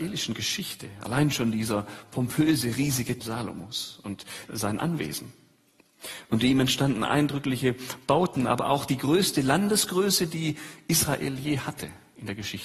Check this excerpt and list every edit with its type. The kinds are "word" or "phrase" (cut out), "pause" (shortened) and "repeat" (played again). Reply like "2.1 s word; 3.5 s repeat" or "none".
3.2 s word; 4.4 s word